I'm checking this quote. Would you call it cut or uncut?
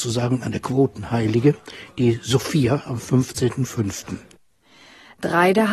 uncut